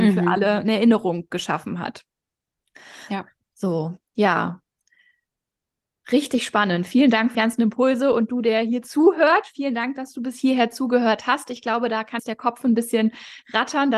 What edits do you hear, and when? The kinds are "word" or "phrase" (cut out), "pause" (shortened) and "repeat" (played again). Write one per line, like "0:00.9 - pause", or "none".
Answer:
0:07.3 - word
0:12.2 - word